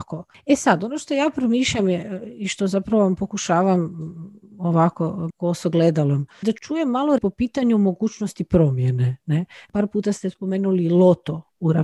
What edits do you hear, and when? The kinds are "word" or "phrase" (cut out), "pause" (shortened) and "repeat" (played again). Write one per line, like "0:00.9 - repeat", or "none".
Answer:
0:05.3 - phrase
0:06.4 - word
0:07.2 - word